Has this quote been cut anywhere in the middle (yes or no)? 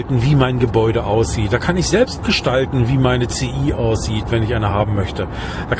no